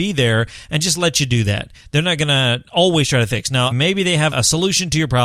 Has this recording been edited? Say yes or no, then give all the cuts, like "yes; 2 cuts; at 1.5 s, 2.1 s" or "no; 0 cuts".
yes; 2 cuts; at 3.7 s, 4.3 s